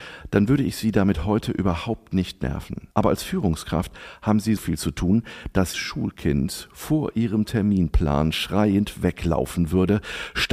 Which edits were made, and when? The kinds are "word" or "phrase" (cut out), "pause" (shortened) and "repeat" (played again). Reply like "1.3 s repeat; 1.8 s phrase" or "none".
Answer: 2.9 s pause; 4.6 s word; 5.7 s word